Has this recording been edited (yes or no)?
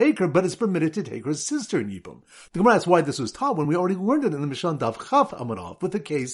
no